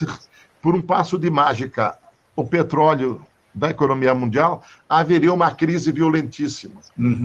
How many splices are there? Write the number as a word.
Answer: zero